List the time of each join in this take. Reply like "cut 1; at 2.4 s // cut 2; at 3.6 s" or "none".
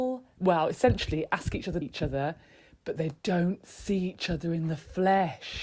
cut 1; at 1.8 s